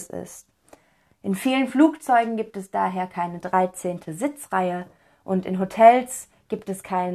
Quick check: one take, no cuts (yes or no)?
yes